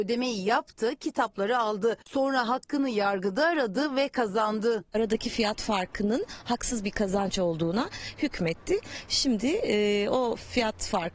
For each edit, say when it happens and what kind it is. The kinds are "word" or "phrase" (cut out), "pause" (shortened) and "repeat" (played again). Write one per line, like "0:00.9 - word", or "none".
none